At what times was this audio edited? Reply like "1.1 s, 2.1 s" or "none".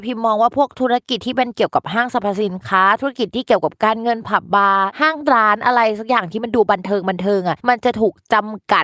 7.6 s